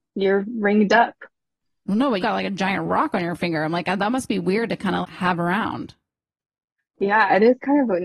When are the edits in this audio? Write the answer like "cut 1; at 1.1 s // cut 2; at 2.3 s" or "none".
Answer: cut 1; at 2.2 s // cut 2; at 5.0 s